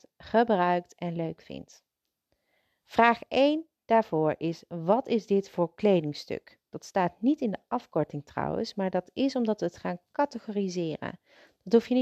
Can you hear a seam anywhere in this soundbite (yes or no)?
yes